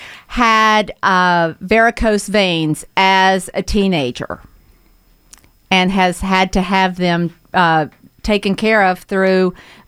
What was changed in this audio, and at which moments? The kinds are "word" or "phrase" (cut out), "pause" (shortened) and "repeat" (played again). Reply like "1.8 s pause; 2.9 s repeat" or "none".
none